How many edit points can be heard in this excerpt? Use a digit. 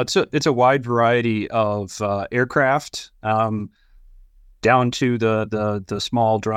0